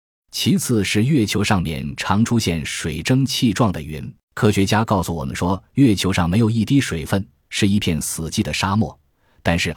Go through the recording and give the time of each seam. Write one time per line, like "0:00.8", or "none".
0:04.2